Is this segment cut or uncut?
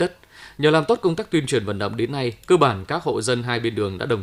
uncut